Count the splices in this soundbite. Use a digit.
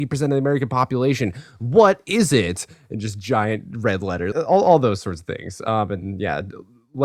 1